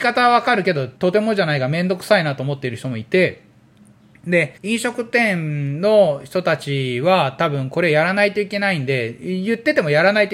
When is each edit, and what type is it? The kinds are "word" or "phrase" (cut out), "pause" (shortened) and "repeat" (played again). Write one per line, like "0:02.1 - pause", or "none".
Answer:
0:01.0 - pause
0:04.6 - pause